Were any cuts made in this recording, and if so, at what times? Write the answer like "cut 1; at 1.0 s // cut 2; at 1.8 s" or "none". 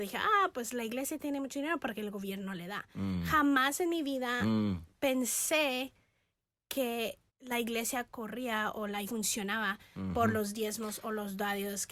cut 1; at 7.3 s // cut 2; at 9.0 s